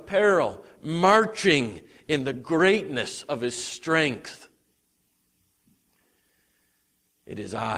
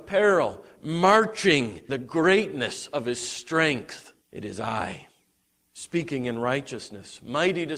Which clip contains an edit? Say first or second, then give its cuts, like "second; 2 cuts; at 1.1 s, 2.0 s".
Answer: second; 2 cuts; at 1.9 s, 4.2 s